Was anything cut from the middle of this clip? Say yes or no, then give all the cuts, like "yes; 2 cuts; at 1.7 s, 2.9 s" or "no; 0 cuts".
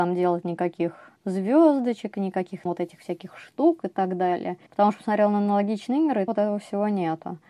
yes; 4 cuts; at 1.2 s, 2.7 s, 4.7 s, 6.3 s